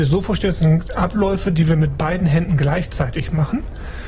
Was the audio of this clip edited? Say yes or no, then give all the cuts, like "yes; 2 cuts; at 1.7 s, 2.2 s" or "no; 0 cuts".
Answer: no; 0 cuts